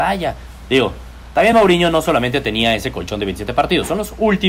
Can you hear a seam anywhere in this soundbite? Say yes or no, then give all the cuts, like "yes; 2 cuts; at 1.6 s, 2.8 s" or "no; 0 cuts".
no; 0 cuts